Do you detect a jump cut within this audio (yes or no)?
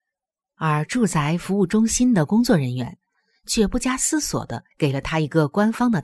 yes